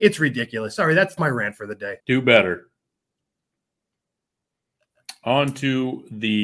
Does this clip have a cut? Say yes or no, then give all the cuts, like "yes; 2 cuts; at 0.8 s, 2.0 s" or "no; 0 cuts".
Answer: yes; 2 cuts; at 1.2 s, 2.0 s